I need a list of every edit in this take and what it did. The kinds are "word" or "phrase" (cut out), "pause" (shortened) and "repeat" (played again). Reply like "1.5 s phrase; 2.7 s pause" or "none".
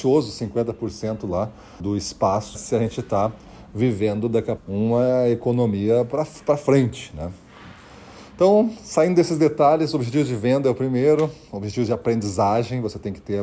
1.8 s word; 2.5 s word; 4.6 s word